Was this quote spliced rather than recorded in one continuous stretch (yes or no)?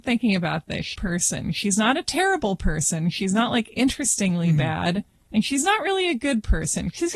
yes